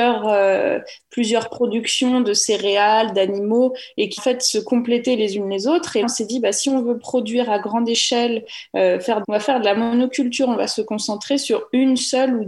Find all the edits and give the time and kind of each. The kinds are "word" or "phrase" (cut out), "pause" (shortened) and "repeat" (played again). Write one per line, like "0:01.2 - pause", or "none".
0:04.2 - word
0:06.0 - word
0:09.2 - phrase